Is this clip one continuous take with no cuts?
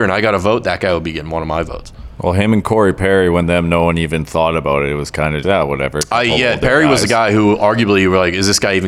no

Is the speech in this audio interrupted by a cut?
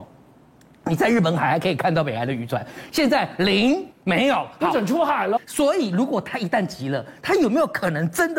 yes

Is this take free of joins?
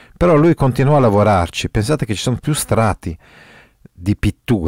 yes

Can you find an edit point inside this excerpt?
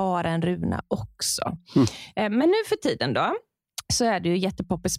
no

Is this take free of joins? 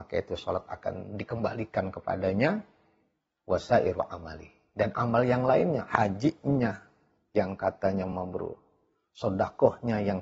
yes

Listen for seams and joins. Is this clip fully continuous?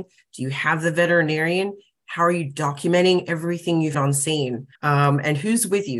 no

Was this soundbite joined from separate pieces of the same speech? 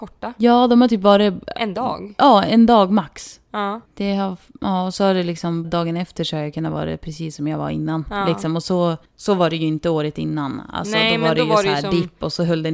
yes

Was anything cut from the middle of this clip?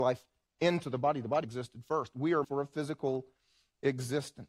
yes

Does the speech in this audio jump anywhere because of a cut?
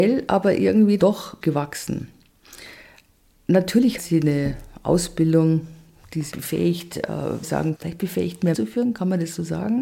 yes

